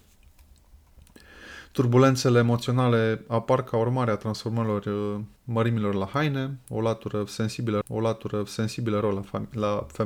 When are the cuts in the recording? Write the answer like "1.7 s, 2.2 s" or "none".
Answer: 5.4 s, 7.8 s

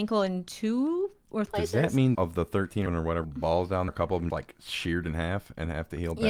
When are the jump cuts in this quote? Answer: 1.5 s, 2.1 s, 2.9 s, 3.2 s, 3.9 s, 4.3 s

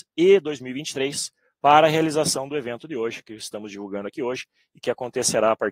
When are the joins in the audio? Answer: none

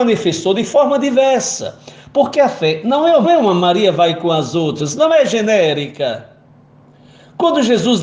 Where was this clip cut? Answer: 3.2 s

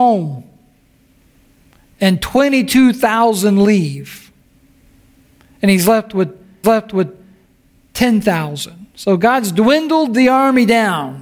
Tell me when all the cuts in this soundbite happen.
6.6 s

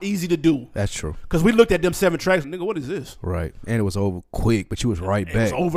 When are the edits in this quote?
2.4 s

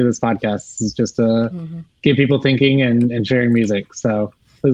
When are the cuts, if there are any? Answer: none

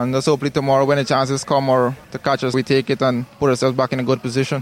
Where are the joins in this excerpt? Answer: 2.0 s, 2.5 s, 3.3 s

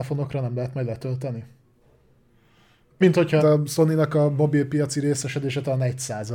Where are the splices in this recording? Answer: 3.0 s, 3.4 s

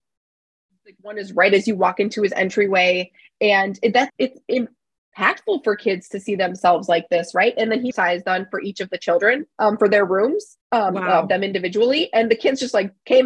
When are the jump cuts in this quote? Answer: 3.2 s, 4.1 s, 7.9 s, 9.5 s, 10.6 s

